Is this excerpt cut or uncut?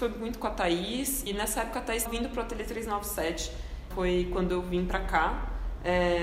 cut